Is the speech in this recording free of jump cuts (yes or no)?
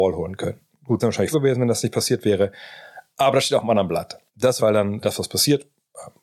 no